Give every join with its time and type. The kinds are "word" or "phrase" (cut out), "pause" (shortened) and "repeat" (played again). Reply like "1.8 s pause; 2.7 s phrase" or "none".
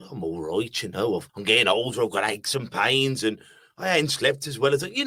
1.3 s pause